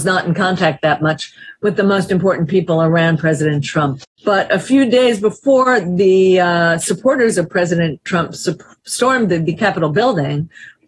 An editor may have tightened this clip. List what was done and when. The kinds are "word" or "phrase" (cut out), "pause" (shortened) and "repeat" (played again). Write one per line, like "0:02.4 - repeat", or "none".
0:04.1 - pause

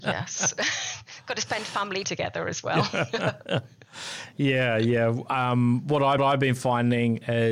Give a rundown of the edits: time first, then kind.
0:02.0 - word
0:06.2 - repeat

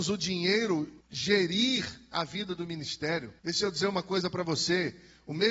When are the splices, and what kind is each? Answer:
0:01.0 - pause
0:03.4 - pause

